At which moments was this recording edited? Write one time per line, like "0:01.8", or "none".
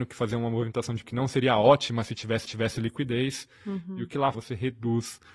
0:01.0
0:02.5
0:04.3